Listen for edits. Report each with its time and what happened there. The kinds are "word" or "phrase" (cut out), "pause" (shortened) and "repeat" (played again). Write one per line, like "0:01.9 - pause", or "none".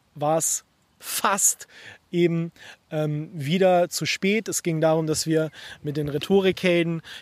none

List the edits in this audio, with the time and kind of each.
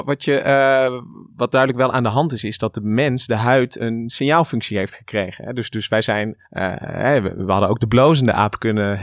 0:01.3 - pause
0:06.4 - pause

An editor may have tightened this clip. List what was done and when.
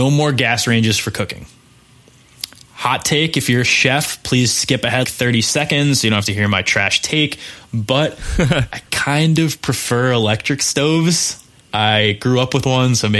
0:05.0 - word
0:08.8 - pause
0:11.6 - pause

